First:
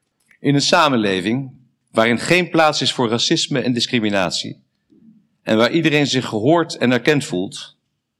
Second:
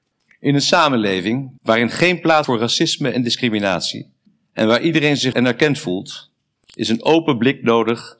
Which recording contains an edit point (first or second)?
second